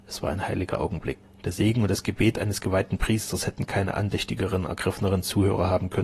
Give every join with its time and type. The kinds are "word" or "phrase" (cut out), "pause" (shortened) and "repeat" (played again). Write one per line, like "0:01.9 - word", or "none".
none

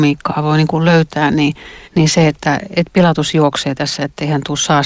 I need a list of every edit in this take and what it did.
0:01.8 - pause

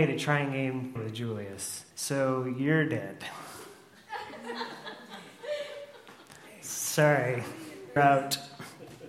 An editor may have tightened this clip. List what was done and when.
0:01.0 - word
0:01.9 - pause
0:08.0 - word

